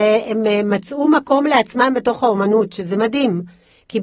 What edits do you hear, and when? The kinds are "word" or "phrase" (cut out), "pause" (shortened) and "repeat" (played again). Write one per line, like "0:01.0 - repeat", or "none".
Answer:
none